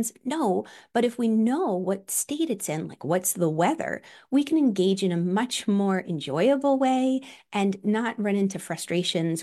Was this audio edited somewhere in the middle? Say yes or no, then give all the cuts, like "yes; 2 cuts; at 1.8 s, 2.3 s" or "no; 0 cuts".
no; 0 cuts